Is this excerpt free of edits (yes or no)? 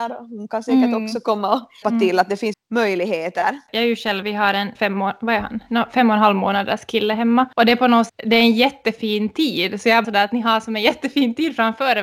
no